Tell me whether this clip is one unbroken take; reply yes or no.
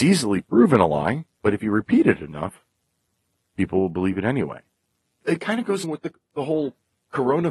no